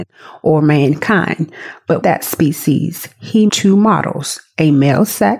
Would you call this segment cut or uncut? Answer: cut